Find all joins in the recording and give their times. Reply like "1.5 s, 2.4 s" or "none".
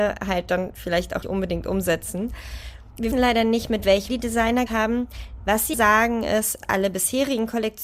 1.2 s, 3.1 s, 4.1 s, 4.7 s, 5.7 s, 6.6 s